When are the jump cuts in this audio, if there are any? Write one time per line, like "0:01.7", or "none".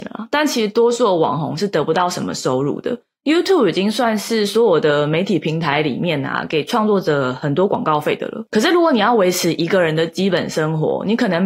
none